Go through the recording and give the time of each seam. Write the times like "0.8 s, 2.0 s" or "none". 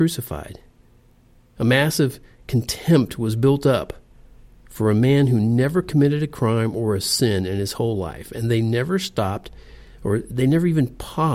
none